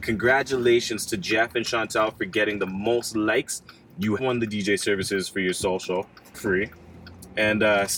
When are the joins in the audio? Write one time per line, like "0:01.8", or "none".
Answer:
0:04.2
0:06.3